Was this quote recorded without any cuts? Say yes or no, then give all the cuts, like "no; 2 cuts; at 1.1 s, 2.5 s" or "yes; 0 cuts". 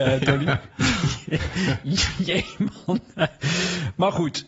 yes; 0 cuts